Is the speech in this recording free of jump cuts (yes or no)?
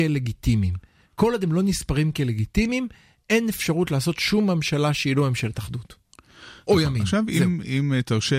yes